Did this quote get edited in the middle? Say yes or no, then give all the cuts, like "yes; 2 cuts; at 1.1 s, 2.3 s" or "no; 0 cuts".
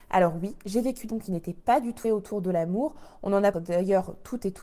yes; 3 cuts; at 1.1 s, 2.0 s, 3.5 s